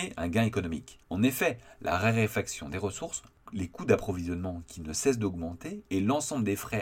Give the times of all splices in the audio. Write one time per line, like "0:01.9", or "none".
0:01.0

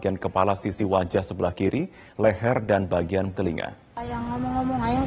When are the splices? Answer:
0:03.3

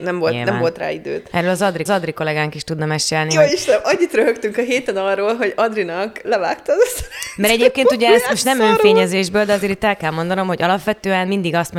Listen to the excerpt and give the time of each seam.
0:01.9
0:06.2

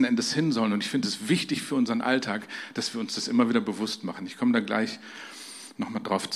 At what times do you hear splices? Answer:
none

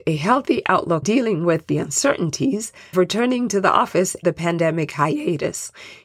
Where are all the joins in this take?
0:01.0
0:02.9
0:04.2

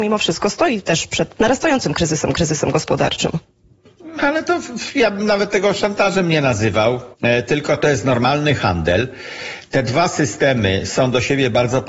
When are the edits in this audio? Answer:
0:01.4
0:02.3
0:07.1

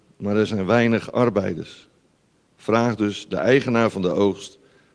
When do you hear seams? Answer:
none

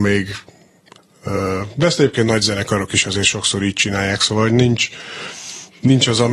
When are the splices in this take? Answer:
none

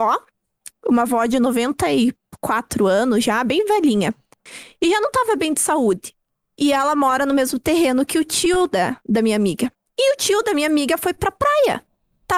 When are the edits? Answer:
none

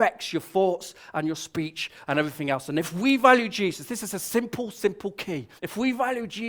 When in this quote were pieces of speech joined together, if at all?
0:05.6

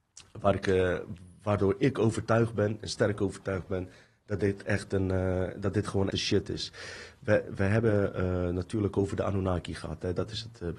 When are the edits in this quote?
0:06.1

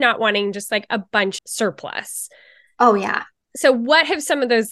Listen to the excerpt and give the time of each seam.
0:01.4

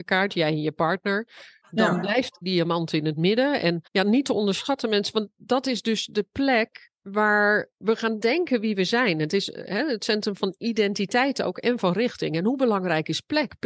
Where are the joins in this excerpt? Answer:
0:02.4
0:03.9
0:07.7

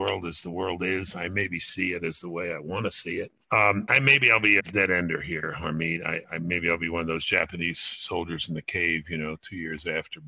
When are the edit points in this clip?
0:03.9
0:04.6

